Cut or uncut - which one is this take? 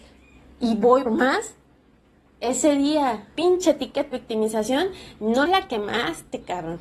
cut